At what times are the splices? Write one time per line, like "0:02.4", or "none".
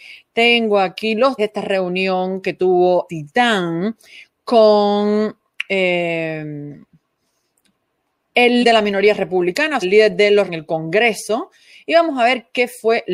0:01.4
0:03.1
0:08.6
0:09.8
0:10.5